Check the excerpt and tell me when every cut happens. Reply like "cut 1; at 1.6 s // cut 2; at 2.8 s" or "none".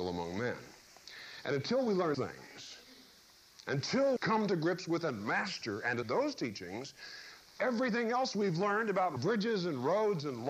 cut 1; at 2.1 s // cut 2; at 4.2 s // cut 3; at 6.0 s